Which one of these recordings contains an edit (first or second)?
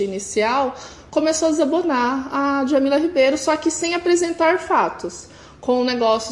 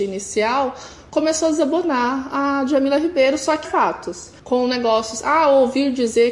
second